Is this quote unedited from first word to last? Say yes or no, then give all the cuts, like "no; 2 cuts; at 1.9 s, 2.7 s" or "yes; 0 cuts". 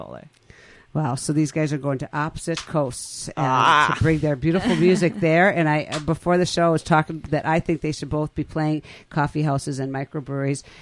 yes; 0 cuts